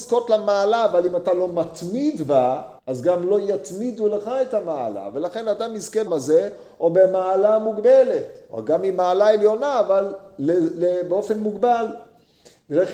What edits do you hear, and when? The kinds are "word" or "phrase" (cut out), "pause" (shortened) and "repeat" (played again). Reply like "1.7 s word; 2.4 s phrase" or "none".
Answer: 2.8 s pause; 6.1 s phrase